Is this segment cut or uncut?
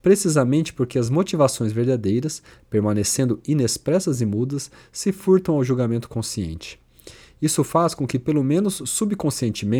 uncut